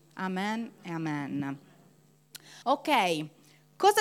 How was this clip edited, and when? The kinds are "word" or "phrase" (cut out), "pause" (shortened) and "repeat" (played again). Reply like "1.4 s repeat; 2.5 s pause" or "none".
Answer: 2.6 s pause